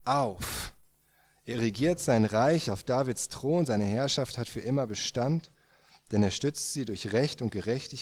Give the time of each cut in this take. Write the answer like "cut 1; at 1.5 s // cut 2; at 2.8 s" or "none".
none